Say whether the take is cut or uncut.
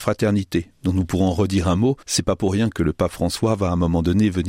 cut